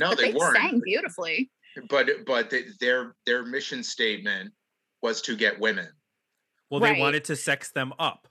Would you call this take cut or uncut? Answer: uncut